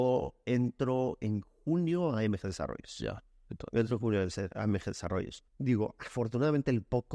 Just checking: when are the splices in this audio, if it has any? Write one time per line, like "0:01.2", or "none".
0:05.5